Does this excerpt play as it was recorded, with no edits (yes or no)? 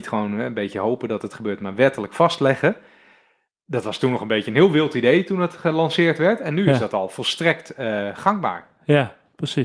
yes